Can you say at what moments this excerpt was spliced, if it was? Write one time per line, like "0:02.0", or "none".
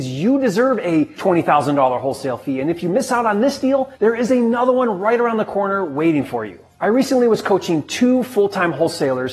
none